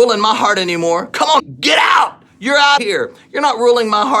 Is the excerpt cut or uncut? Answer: cut